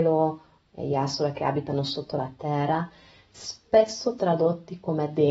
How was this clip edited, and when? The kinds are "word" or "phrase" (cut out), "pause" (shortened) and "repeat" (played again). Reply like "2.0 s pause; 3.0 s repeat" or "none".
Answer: none